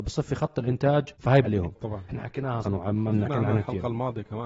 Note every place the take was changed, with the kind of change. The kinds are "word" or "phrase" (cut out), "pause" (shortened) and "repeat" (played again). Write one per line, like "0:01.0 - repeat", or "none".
0:01.1 - word
0:01.4 - word
0:02.1 - word
0:02.6 - word
0:03.3 - word